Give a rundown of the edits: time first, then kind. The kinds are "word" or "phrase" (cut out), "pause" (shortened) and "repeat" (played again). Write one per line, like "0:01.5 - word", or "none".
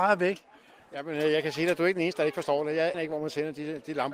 0:02.9 - word